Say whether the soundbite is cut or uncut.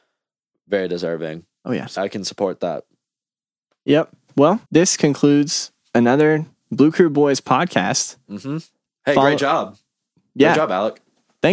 cut